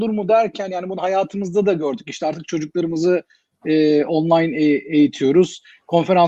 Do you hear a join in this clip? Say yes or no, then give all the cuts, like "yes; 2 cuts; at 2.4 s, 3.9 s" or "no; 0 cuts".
no; 0 cuts